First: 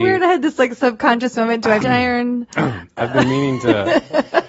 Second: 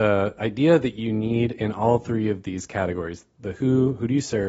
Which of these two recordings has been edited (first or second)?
first